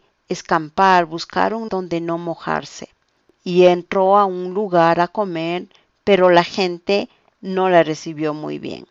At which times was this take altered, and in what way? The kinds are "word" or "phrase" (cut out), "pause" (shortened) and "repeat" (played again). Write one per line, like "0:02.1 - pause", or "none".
0:01.7 - word